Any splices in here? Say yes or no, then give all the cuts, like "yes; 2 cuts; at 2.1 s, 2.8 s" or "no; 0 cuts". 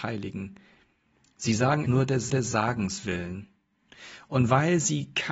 yes; 2 cuts; at 1.9 s, 2.3 s